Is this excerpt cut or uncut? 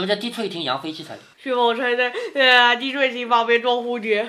cut